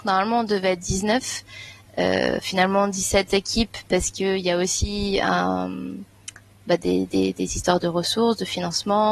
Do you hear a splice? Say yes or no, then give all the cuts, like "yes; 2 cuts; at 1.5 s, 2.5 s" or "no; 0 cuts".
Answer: no; 0 cuts